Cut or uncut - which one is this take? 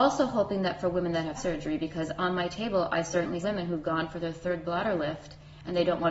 cut